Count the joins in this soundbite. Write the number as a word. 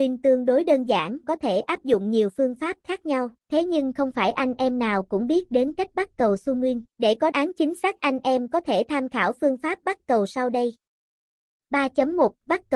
four